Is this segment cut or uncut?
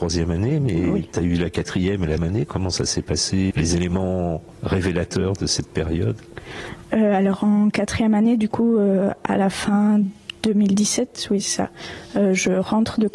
cut